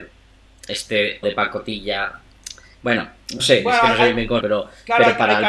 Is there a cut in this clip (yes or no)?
yes